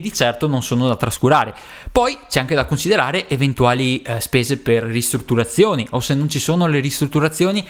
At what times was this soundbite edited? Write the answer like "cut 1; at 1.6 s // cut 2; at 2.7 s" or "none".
none